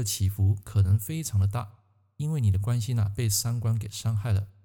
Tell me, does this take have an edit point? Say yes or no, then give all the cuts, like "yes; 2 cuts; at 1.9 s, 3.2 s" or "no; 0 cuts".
no; 0 cuts